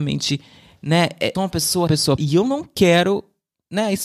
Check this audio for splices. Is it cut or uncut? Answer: cut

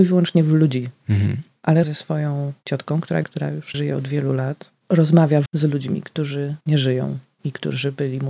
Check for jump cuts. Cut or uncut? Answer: cut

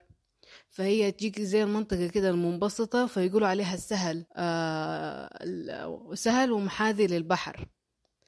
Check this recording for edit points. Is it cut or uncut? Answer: cut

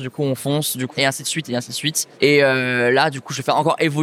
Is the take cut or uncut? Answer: cut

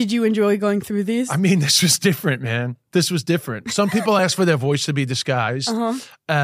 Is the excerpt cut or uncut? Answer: uncut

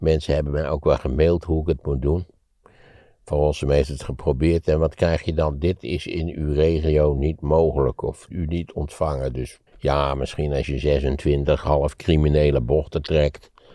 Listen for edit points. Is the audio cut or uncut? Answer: cut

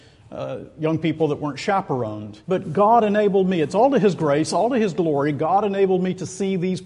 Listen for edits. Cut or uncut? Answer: cut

